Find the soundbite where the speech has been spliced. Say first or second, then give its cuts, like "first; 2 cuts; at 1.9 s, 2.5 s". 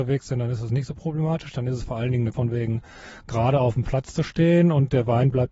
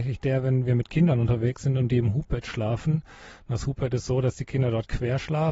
first; 1 cut; at 2.3 s